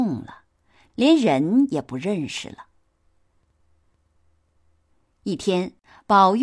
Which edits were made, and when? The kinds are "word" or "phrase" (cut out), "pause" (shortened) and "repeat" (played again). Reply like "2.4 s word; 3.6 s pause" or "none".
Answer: none